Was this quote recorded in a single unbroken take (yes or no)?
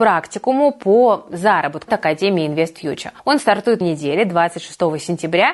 no